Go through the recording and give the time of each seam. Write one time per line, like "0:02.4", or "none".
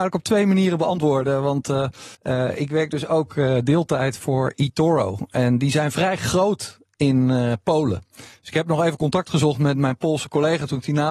0:02.1